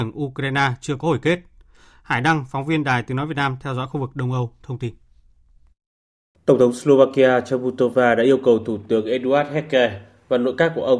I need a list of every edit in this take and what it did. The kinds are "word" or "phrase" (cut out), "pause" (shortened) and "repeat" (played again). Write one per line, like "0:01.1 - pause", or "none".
none